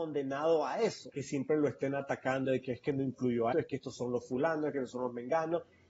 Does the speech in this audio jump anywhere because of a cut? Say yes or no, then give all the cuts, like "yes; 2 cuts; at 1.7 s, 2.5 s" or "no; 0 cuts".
yes; 2 cuts; at 1.1 s, 3.5 s